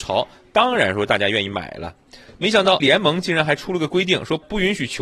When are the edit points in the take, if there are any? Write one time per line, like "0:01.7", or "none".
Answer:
0:02.8